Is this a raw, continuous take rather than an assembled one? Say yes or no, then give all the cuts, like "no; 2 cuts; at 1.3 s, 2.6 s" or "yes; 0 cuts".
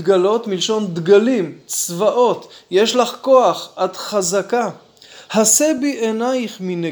yes; 0 cuts